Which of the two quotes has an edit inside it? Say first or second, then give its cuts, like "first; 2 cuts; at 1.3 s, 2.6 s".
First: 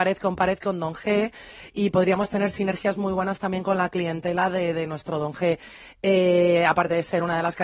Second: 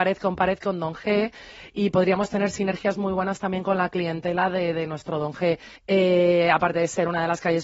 second; 1 cut; at 5.8 s